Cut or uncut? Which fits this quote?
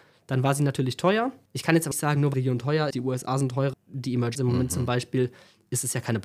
cut